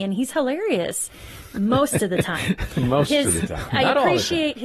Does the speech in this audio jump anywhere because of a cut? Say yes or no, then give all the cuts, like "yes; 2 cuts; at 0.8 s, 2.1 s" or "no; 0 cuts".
no; 0 cuts